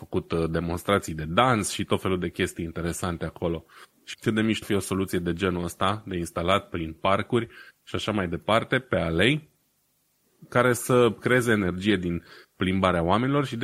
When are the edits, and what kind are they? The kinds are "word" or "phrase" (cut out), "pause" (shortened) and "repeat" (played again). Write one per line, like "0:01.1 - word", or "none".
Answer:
0:04.1 - phrase
0:04.6 - word